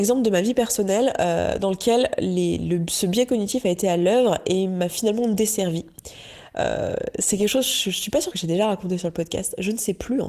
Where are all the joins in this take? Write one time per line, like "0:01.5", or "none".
0:08.3